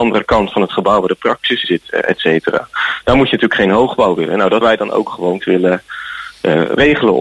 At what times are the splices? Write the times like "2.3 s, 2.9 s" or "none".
1.6 s, 4.6 s, 5.4 s